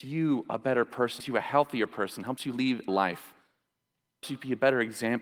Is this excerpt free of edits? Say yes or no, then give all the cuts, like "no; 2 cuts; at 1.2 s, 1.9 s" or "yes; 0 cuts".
no; 3 cuts; at 1.2 s, 2.9 s, 4.2 s